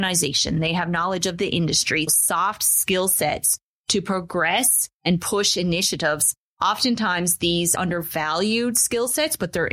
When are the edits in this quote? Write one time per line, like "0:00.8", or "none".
0:02.1
0:04.9
0:07.7

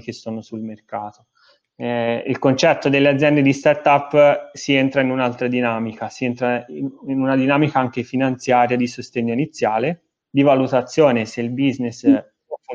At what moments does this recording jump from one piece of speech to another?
none

